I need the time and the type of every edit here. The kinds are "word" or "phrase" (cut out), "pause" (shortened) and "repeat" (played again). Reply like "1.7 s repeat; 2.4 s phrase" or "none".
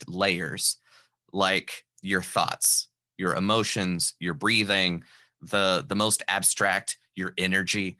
none

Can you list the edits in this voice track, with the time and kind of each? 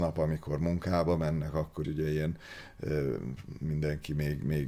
1.8 s word

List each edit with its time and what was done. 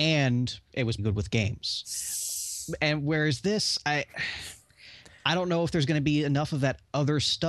1.0 s word

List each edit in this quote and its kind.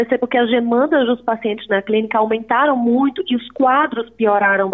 none

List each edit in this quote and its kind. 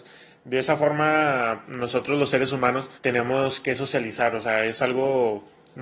1.6 s word; 3.0 s pause

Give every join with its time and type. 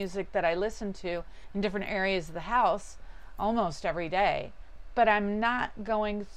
none

